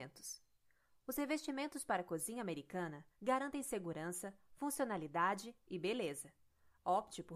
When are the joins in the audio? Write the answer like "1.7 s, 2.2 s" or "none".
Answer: 3.1 s